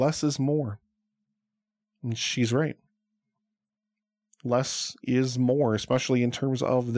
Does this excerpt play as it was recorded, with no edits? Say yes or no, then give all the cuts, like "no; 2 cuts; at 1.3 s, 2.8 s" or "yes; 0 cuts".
yes; 0 cuts